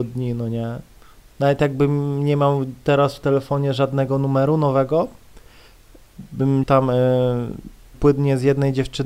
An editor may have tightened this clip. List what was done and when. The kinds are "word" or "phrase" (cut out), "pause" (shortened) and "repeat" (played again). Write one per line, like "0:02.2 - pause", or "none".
0:06.6 - word
0:07.9 - word